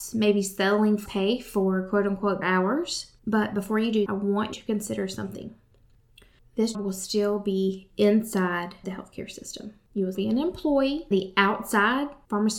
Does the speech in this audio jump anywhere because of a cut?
yes; 8 cuts; at 1.1 s, 2.4 s, 4.1 s, 4.5 s, 6.7 s, 8.8 s, 10.1 s, 11.1 s

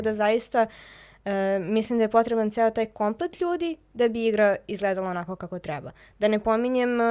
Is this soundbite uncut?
yes; 0 cuts

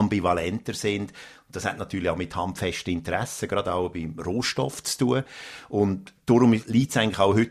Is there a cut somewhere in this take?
no; 0 cuts

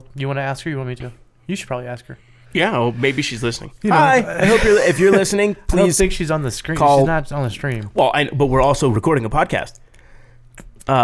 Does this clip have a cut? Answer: no; 0 cuts

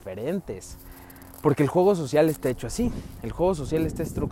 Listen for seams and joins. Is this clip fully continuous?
yes; 0 cuts

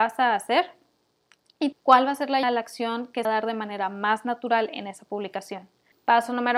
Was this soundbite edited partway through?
yes; 3 cuts; at 1.7 s, 2.4 s, 3.2 s

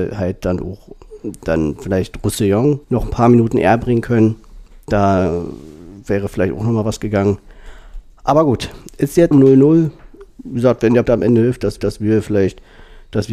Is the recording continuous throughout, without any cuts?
no; 4 cuts; at 2.8 s, 9.3 s, 11.1 s, 11.8 s

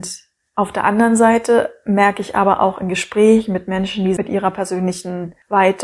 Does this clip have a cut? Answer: no; 0 cuts

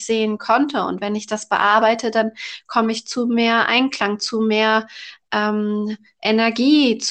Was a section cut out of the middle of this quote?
no; 0 cuts

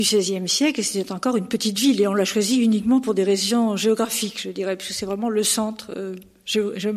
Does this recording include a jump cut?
no; 0 cuts

